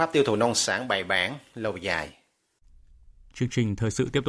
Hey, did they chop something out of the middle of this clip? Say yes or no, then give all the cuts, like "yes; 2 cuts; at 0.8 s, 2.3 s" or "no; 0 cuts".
no; 0 cuts